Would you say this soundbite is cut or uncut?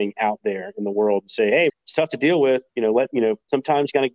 cut